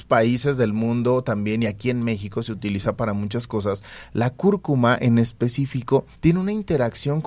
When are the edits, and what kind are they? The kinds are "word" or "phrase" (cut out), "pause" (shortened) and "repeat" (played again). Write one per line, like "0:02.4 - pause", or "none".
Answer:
0:06.1 - pause